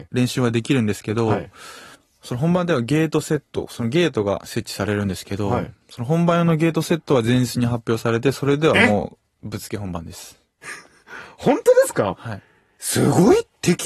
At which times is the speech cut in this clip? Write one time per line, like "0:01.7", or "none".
0:01.9